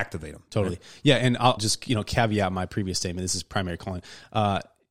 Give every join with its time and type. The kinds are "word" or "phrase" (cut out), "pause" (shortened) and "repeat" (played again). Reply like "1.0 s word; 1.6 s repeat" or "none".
1.6 s word